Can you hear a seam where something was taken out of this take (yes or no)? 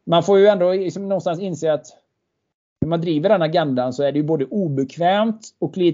no